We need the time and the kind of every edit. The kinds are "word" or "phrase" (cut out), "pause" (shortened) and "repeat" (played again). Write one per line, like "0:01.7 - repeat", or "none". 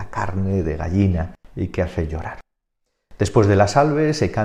0:01.4 - pause